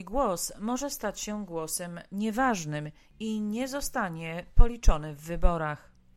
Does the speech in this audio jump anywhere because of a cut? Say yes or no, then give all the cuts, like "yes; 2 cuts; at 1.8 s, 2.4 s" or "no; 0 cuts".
no; 0 cuts